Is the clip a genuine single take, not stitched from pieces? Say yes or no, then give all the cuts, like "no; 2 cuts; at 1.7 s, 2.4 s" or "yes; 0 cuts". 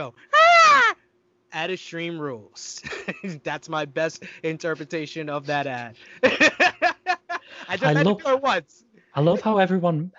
yes; 0 cuts